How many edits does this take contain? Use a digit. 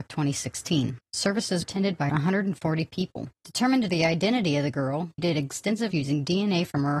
6